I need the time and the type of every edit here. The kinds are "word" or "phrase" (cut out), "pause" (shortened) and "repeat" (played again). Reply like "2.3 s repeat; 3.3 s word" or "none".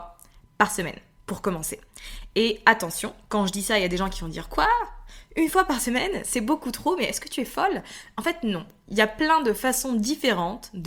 none